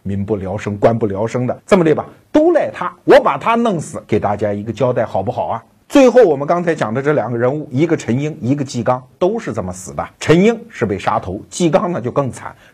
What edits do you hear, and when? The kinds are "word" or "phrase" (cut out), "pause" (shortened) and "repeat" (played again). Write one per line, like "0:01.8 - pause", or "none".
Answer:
0:01.6 - pause
0:05.8 - pause
0:10.1 - pause